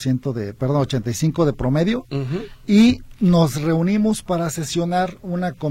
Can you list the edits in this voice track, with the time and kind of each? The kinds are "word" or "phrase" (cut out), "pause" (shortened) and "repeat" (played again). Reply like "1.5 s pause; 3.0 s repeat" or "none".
none